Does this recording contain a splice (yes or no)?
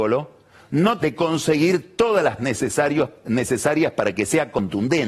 yes